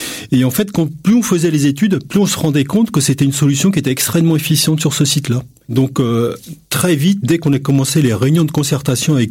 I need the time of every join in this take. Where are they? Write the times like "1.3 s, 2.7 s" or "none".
none